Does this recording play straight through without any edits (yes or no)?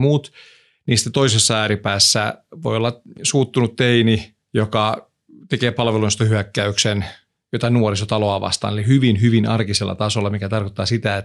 yes